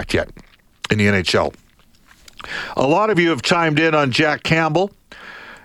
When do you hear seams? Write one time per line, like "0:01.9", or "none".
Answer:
none